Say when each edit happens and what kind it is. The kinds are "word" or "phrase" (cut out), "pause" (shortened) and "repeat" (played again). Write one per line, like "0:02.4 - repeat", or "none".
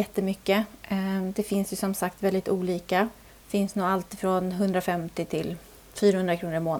0:03.3 - pause